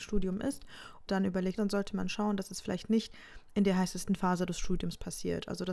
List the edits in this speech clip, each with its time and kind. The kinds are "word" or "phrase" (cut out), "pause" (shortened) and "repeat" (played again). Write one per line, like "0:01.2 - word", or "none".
0:01.1 - word
0:01.6 - phrase